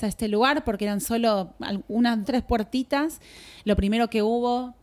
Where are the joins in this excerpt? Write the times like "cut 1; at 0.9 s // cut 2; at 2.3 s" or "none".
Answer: cut 1; at 2.2 s